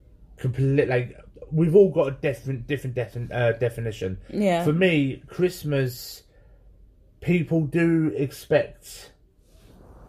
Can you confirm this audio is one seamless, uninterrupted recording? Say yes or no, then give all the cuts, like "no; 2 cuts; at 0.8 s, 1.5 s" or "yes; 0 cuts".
yes; 0 cuts